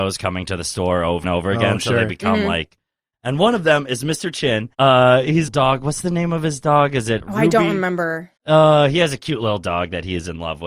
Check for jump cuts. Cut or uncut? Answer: cut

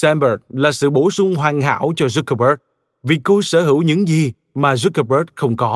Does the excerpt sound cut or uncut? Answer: uncut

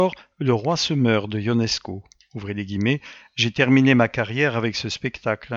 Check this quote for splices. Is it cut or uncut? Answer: uncut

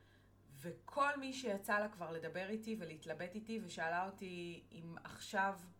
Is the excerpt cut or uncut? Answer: uncut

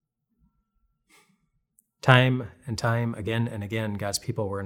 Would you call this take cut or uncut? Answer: uncut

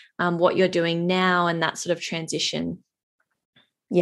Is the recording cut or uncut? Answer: uncut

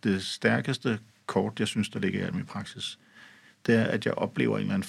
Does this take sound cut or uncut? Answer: uncut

